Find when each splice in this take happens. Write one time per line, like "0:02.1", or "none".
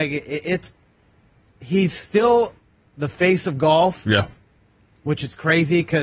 none